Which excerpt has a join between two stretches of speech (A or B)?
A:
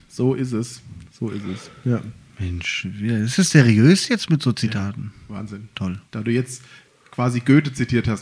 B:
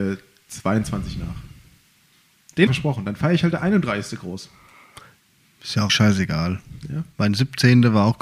B